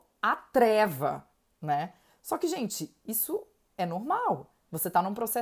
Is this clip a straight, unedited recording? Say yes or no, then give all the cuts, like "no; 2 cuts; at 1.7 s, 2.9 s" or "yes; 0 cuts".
yes; 0 cuts